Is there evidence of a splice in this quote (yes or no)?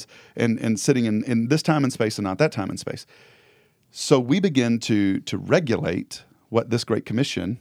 no